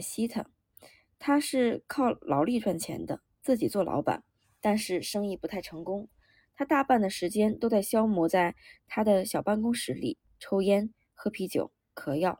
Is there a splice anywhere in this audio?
no; 0 cuts

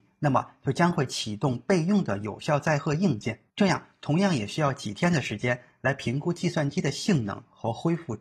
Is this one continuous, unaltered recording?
no; 1 cut; at 3.5 s

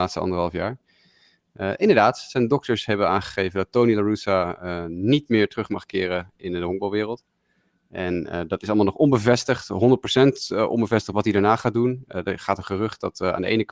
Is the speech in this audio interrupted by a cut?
no; 0 cuts

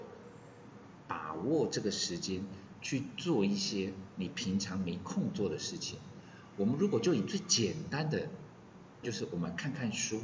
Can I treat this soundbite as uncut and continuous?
no; 1 cut; at 9.0 s

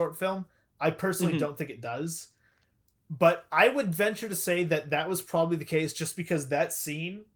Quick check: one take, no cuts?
yes; 0 cuts

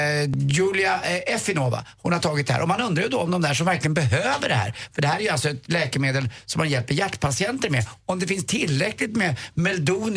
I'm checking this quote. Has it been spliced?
no; 0 cuts

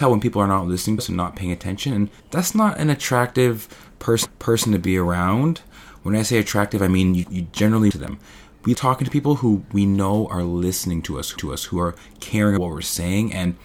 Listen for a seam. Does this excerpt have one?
yes; 8 cuts; at 1.0 s, 2.2 s, 4.3 s, 7.2 s, 7.9 s, 8.7 s, 11.4 s, 12.6 s

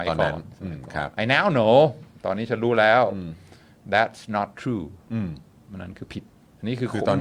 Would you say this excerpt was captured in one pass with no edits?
no; 2 cuts; at 1.1 s, 5.6 s

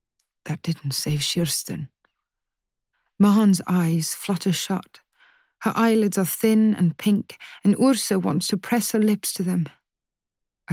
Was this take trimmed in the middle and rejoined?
no; 0 cuts

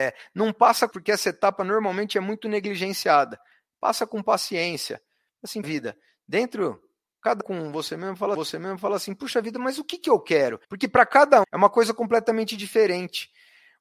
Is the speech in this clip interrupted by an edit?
yes; 6 cuts; at 0.9 s, 5.6 s, 7.4 s, 8.3 s, 10.6 s, 11.4 s

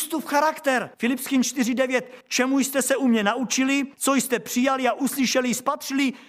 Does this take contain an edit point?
yes; 3 cuts; at 0.9 s, 2.2 s, 3.9 s

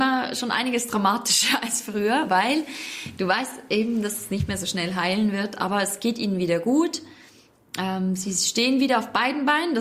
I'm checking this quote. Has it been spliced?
no; 0 cuts

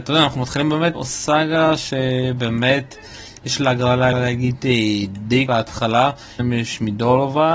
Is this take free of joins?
no; 4 cuts; at 0.9 s, 4.1 s, 5.5 s, 6.4 s

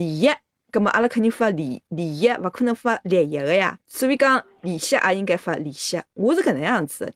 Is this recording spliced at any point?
yes; 1 cut; at 3.8 s

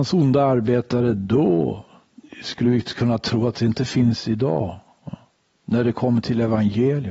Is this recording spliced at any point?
no; 0 cuts

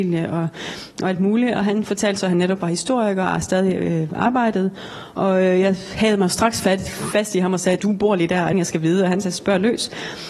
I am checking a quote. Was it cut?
yes; 2 cuts; at 7.8 s, 8.5 s

